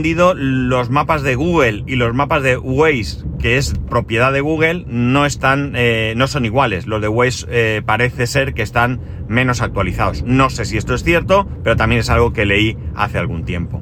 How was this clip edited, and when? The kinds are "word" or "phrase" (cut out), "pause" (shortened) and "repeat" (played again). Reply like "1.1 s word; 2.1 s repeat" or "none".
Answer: none

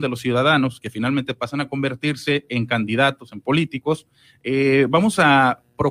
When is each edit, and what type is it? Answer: none

